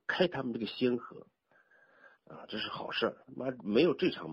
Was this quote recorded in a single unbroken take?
no; 2 cuts; at 2.1 s, 3.2 s

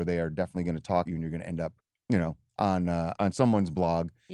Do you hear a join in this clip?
yes; 3 cuts; at 1.1 s, 1.8 s, 3.1 s

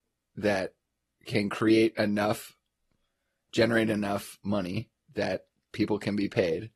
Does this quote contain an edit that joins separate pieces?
no; 0 cuts

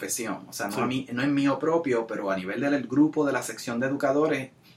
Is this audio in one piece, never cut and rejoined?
yes; 0 cuts

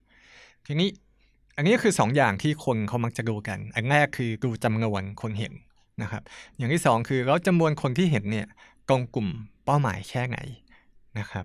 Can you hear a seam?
no; 0 cuts

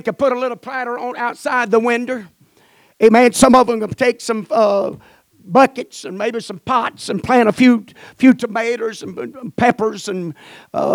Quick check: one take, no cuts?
yes; 0 cuts

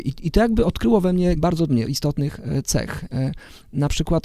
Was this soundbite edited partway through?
yes; 2 cuts; at 1.4 s, 1.7 s

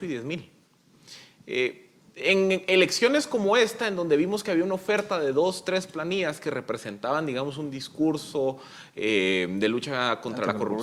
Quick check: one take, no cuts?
yes; 0 cuts

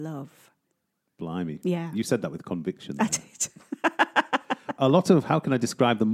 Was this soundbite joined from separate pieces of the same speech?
no; 0 cuts

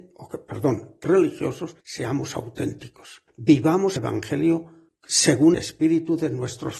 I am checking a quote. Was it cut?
yes; 3 cuts; at 1.0 s, 4.0 s, 5.5 s

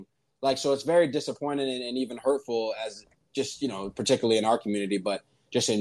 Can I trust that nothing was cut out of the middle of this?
yes; 0 cuts

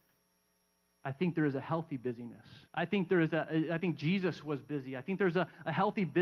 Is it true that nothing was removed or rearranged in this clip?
no; 1 cut; at 2.7 s

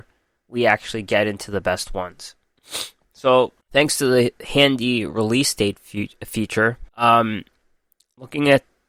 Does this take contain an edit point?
yes; 2 cuts; at 3.6 s, 6.9 s

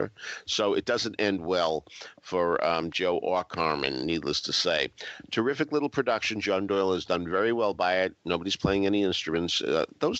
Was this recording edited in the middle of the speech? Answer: no; 0 cuts

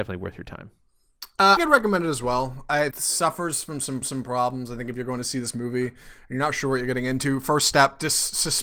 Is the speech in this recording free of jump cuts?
no; 3 cuts; at 1.6 s, 2.9 s, 4.0 s

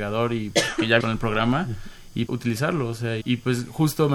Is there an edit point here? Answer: yes; 3 cuts; at 1.0 s, 2.3 s, 3.2 s

